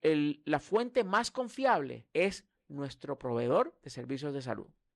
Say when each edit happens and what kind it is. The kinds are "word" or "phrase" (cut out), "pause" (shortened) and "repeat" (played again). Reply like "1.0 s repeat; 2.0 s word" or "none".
2.1 s pause